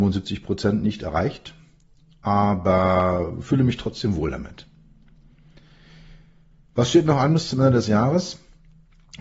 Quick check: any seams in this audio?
no; 0 cuts

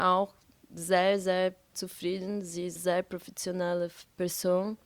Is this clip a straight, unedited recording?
no; 2 cuts; at 1.7 s, 2.8 s

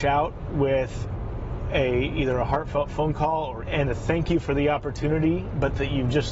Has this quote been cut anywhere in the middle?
yes; 1 cut; at 3.7 s

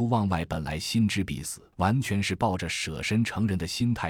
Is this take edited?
yes; 1 cut; at 1.7 s

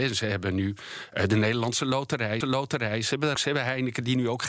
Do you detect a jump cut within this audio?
yes; 2 cuts; at 2.4 s, 3.4 s

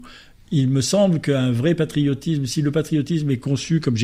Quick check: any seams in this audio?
no; 0 cuts

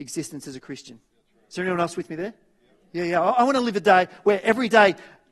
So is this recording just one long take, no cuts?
yes; 0 cuts

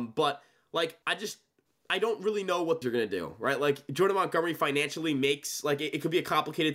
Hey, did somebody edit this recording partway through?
yes; 2 cuts; at 1.0 s, 2.8 s

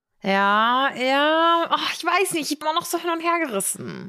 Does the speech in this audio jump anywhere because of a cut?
yes; 1 cut; at 2.6 s

